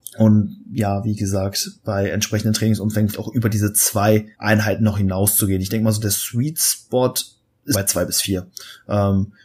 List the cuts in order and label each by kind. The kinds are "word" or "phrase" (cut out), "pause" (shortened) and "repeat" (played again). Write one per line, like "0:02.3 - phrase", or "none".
0:03.1 - word
0:04.3 - pause
0:07.7 - word